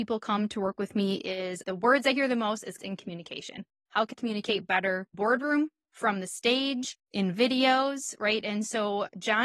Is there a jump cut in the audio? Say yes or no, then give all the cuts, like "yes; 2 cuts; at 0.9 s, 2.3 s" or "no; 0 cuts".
yes; 5 cuts; at 1.6 s, 2.8 s, 4.1 s, 5.1 s, 7.0 s